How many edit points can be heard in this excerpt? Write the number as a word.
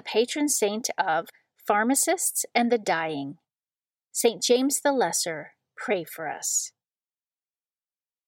zero